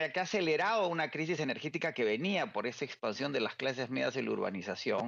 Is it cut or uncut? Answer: uncut